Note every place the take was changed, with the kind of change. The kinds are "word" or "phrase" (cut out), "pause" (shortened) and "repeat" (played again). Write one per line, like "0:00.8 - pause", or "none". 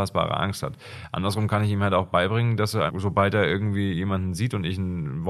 0:02.9 - word

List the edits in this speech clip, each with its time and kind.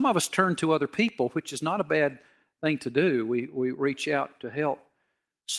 none

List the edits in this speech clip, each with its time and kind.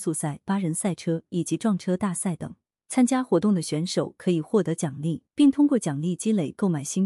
0:05.3 - pause

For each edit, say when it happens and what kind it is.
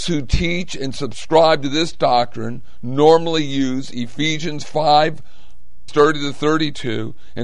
0:05.9 - word

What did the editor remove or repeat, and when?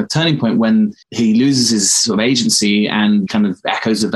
0:01.0 - pause
0:03.3 - word

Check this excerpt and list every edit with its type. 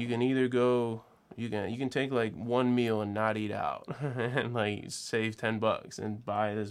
none

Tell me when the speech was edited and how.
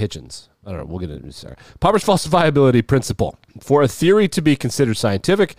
none

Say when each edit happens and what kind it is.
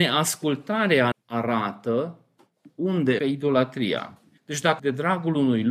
0:01.1 - word
0:03.2 - word
0:04.4 - pause
0:04.8 - word

